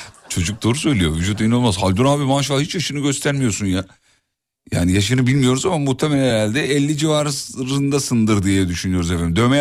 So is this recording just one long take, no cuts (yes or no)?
yes